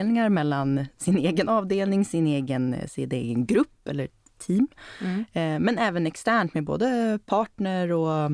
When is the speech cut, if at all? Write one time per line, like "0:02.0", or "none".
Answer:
none